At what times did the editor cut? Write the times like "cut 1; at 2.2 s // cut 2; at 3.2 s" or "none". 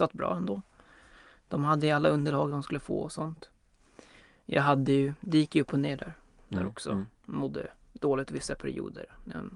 none

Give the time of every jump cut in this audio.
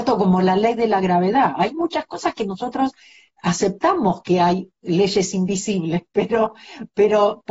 none

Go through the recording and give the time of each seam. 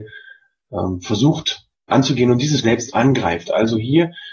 cut 1; at 1.9 s // cut 2; at 2.6 s

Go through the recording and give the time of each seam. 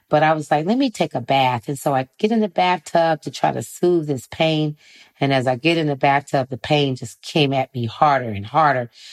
none

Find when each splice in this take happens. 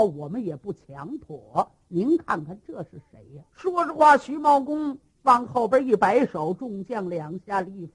cut 1; at 3.5 s

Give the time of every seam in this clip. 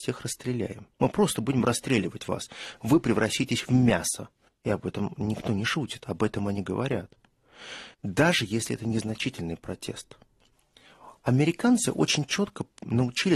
cut 1; at 0.9 s // cut 2; at 4.5 s // cut 3; at 7.9 s // cut 4; at 11.2 s

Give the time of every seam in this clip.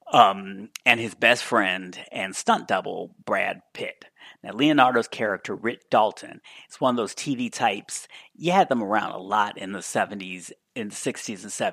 none

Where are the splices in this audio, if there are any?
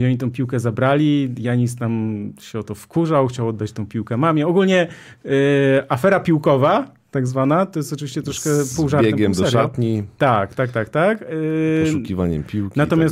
none

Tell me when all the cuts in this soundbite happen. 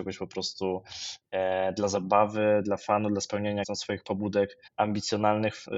cut 1; at 3.6 s // cut 2; at 4.7 s

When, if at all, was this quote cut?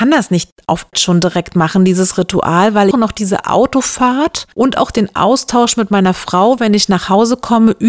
cut 1; at 0.9 s // cut 2; at 2.9 s // cut 3; at 4.5 s

